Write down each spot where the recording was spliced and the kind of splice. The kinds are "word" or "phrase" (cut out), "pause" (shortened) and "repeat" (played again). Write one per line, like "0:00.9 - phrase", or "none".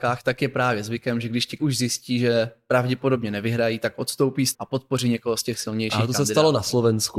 0:01.6 - word
0:04.5 - phrase